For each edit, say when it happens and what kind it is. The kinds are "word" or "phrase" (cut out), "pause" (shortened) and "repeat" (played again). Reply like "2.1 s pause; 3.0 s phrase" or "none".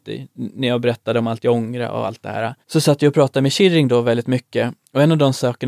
2.6 s pause